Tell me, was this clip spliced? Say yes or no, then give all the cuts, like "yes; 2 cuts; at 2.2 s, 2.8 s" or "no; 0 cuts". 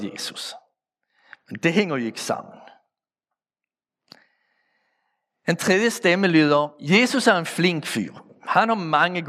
yes; 1 cut; at 6.7 s